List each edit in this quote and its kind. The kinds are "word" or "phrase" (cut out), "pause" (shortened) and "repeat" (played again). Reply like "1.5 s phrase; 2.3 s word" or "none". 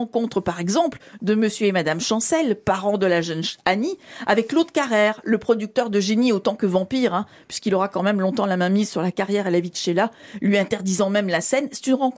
none

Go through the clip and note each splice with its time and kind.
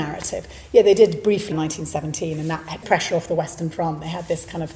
1.5 s phrase; 2.8 s word

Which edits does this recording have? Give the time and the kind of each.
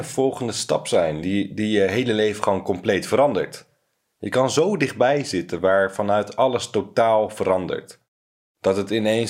none

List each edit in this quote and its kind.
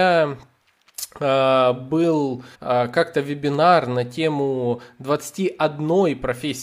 2.5 s pause

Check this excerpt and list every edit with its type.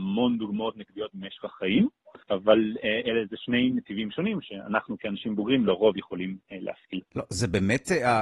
2.2 s pause; 7.1 s pause

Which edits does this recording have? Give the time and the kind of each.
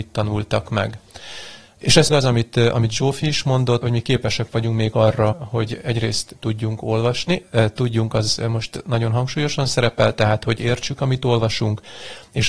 2.1 s word; 3.8 s word; 5.3 s word

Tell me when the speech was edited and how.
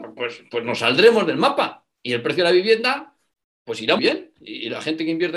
1.9 s pause; 3.3 s pause; 4.0 s word

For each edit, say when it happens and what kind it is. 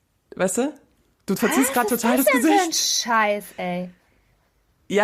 none

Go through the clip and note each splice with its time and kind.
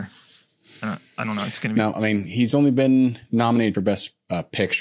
1.9 s word; 3.7 s word

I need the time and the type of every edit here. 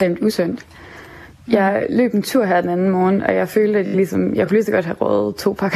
none

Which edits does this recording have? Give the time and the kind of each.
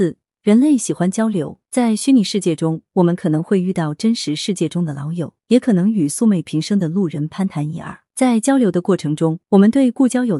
1.6 s pause; 5.4 s pause; 8.1 s pause; 9.4 s pause

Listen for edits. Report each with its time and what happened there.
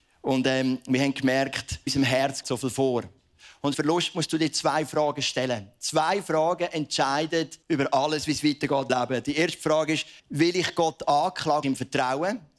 1.9 s word; 2.4 s word; 3.7 s phrase; 7.6 s pause; 8.9 s word; 10.2 s pause; 11.6 s phrase

